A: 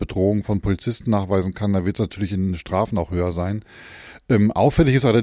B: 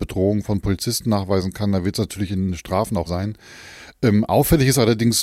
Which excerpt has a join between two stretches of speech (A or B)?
B